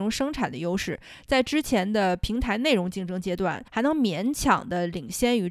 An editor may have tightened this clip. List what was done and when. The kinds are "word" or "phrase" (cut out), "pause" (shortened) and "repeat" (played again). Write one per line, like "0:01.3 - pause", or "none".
0:03.7 - pause